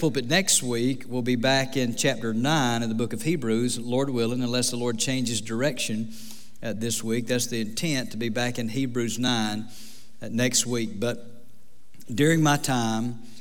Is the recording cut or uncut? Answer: uncut